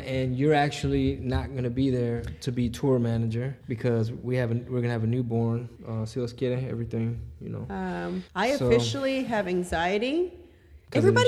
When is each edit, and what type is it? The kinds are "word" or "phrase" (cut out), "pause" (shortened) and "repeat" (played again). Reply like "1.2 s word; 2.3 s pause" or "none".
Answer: 3.6 s pause; 5.8 s pause; 8.3 s pause